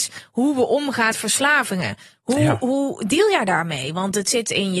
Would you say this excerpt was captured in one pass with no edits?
no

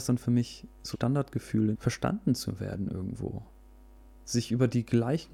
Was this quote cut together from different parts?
yes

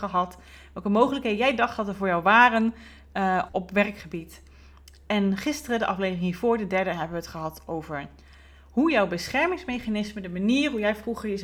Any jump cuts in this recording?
yes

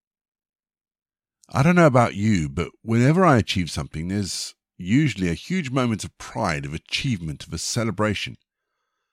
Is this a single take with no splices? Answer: yes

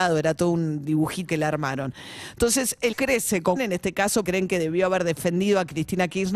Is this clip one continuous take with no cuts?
no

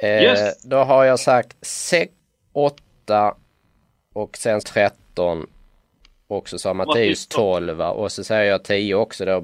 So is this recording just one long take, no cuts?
no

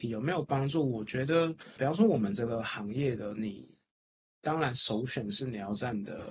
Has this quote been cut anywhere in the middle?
yes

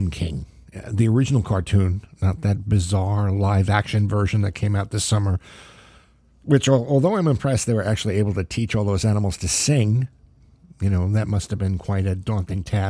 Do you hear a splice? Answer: no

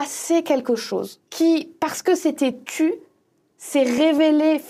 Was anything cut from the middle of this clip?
yes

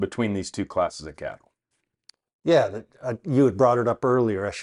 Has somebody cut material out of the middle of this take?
no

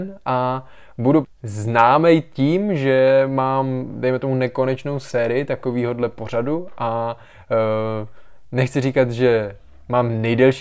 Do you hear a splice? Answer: yes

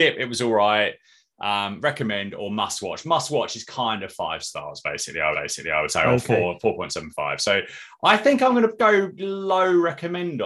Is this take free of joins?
no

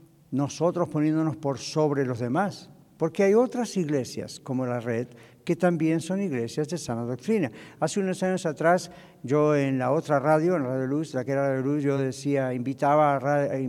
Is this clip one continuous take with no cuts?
yes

